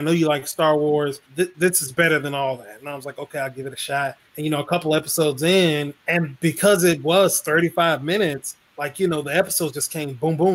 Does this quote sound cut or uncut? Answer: cut